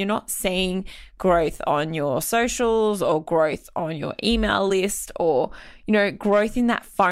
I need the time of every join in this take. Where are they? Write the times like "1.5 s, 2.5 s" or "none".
none